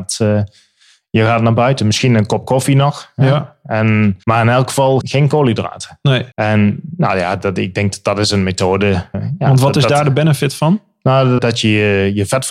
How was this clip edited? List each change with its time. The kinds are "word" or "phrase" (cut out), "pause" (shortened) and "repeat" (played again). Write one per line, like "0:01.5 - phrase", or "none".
0:04.2 - pause
0:05.0 - word
0:06.3 - pause
0:09.1 - word
0:11.4 - word